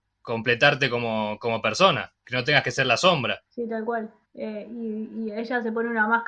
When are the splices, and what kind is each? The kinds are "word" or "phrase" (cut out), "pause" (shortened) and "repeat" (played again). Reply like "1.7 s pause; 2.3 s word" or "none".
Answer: 2.2 s pause; 3.5 s pause; 4.2 s pause